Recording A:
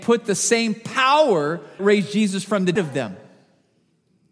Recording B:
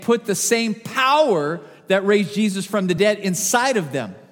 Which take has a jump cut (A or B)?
A